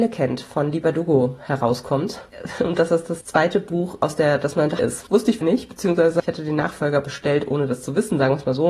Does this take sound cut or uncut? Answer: cut